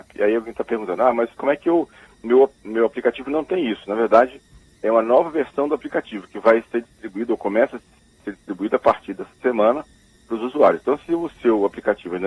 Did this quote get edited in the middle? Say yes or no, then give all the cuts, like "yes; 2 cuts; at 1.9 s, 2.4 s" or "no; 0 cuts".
no; 0 cuts